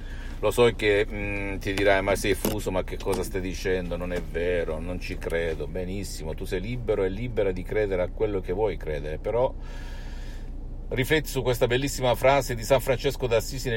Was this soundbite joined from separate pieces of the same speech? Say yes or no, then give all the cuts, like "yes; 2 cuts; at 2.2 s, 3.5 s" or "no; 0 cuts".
no; 0 cuts